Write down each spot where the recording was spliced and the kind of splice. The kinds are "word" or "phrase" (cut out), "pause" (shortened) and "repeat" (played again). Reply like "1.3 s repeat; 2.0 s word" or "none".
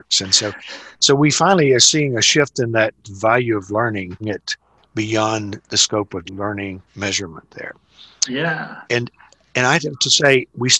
0.9 s pause; 4.2 s word; 6.3 s word; 6.9 s pause; 8.9 s pause